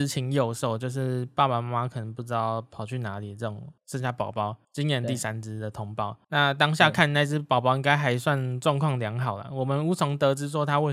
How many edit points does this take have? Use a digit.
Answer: 3